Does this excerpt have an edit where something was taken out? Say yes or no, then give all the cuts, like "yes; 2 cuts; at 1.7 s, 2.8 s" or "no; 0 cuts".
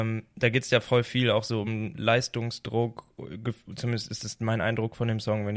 no; 0 cuts